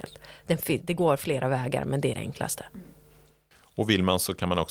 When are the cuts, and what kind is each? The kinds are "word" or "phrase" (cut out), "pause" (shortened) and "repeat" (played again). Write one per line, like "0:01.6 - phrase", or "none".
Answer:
none